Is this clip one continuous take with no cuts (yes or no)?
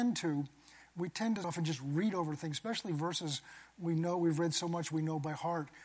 no